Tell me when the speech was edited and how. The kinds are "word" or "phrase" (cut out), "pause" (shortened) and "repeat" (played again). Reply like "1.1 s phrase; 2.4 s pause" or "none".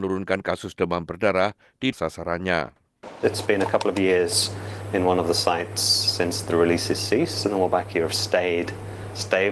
1.9 s word